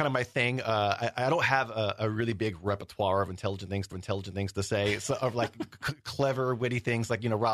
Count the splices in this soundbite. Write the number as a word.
one